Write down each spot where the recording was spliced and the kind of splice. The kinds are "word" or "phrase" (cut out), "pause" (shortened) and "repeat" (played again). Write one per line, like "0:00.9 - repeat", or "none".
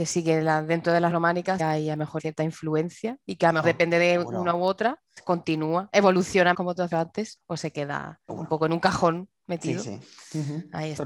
0:01.1 - word
0:01.6 - word
0:02.2 - word
0:03.6 - word
0:05.2 - word
0:06.5 - word
0:06.9 - word
0:07.4 - word
0:08.3 - word